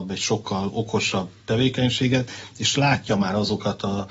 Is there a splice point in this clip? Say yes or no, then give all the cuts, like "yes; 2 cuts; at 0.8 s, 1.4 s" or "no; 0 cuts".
no; 0 cuts